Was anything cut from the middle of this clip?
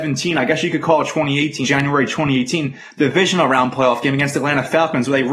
yes; 1 cut; at 1.6 s

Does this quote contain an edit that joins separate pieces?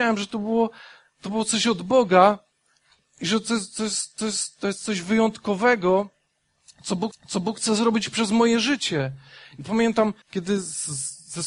yes; 3 cuts; at 4.2 s, 7.1 s, 10.2 s

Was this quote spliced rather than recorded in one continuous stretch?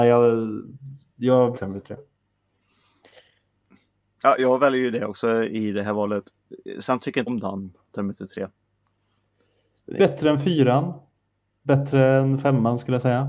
yes; 4 cuts; at 1.5 s, 4.4 s, 7.3 s, 10.0 s

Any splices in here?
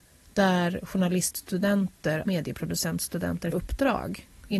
yes; 2 cuts; at 2.2 s, 3.5 s

